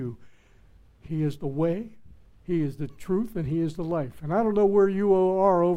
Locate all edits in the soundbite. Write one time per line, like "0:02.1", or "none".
none